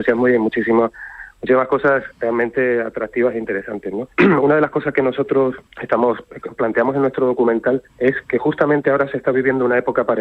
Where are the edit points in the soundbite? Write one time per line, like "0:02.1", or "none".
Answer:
0:02.1
0:04.1
0:05.7
0:07.9